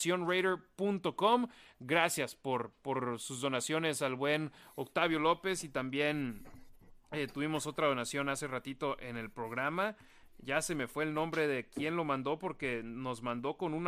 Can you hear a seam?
no; 0 cuts

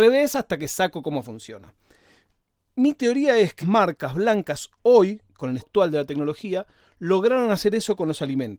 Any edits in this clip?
yes; 3 cuts; at 3.6 s, 5.2 s, 5.6 s

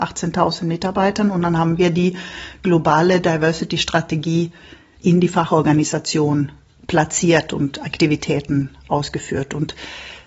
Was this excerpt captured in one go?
yes; 0 cuts

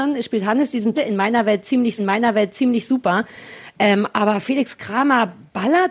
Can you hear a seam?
yes; 2 cuts; at 0.9 s, 2.0 s

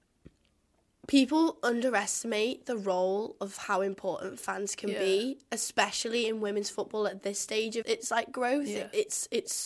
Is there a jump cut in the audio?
yes; 1 cut; at 7.8 s

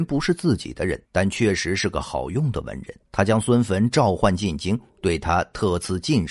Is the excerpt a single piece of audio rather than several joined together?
no; 2 cuts; at 1.1 s, 3.0 s

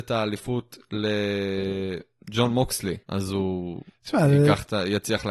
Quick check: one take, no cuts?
no; 1 cut; at 3.0 s

